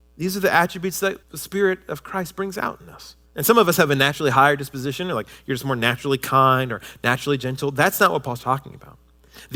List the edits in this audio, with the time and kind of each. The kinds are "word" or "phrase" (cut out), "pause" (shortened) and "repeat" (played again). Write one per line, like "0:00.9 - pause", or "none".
0:01.2 - pause
0:03.3 - pause

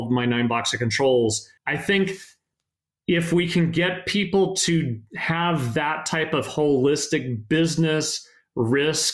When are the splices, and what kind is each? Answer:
0:01.6 - pause

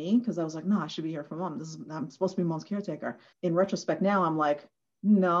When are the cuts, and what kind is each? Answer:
0:03.3 - pause

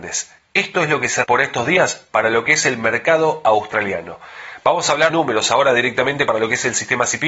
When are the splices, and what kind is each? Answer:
0:01.2 - word
0:05.1 - word

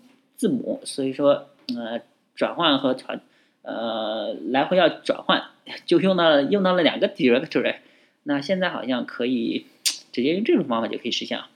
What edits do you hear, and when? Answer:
none

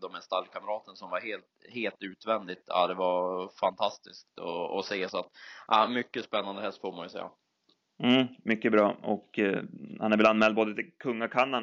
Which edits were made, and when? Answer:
none

